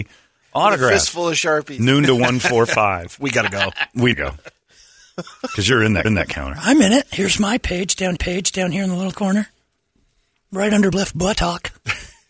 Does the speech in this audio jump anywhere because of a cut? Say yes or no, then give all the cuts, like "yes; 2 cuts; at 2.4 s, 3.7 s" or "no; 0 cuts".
yes; 5 cuts; at 4.1 s, 6.0 s, 8.2 s, 9.1 s, 10.9 s